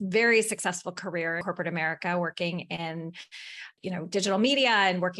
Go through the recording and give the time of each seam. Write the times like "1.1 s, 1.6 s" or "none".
1.4 s, 3.8 s